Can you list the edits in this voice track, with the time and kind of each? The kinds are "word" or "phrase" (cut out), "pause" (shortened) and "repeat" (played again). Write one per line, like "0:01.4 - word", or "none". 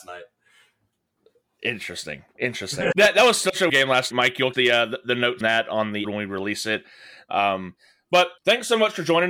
0:02.9 - word
0:03.7 - word
0:04.1 - word
0:04.5 - word
0:05.4 - word
0:06.0 - word
0:08.4 - pause